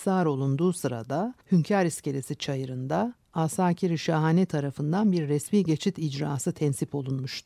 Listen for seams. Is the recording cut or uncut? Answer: cut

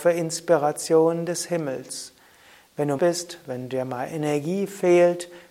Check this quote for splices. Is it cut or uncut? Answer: cut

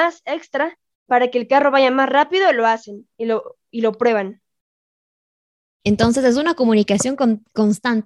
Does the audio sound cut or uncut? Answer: uncut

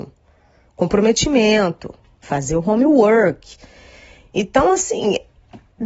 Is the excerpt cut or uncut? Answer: uncut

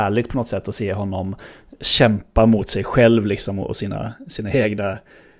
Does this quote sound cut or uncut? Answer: uncut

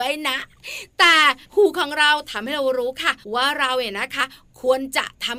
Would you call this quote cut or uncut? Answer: cut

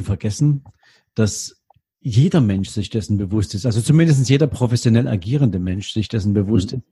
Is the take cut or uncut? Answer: uncut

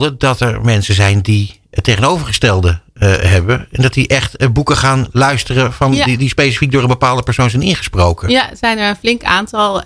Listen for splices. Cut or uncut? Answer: uncut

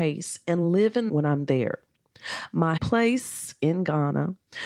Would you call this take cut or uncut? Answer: cut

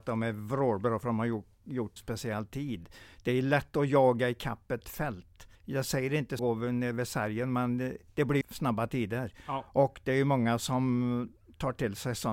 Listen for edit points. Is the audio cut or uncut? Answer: cut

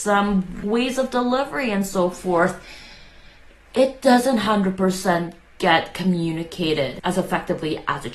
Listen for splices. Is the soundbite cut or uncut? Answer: uncut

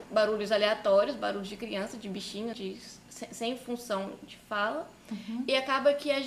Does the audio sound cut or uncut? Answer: cut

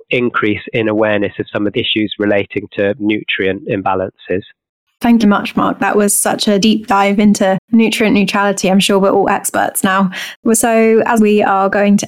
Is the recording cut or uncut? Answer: cut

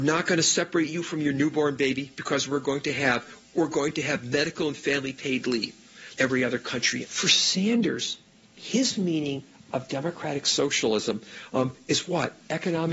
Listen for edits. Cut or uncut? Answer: cut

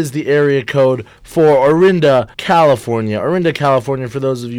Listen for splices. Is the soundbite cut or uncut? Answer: cut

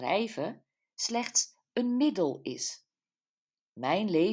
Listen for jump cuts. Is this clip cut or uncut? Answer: uncut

